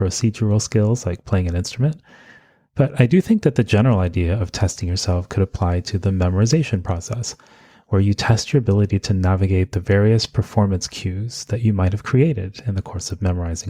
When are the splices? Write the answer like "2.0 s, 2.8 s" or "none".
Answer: none